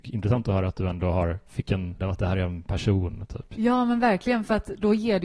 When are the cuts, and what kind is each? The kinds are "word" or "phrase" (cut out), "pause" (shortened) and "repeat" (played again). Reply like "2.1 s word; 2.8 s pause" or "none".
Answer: 2.0 s word